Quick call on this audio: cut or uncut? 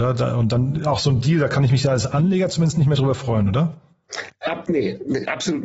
uncut